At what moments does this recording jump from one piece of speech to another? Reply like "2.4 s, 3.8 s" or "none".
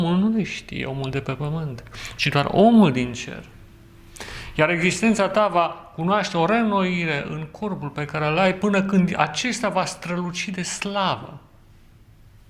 none